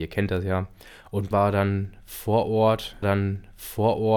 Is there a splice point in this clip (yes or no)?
yes